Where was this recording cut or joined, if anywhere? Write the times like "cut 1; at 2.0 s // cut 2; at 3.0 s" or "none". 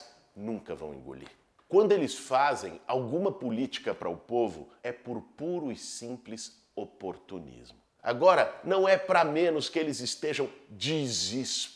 none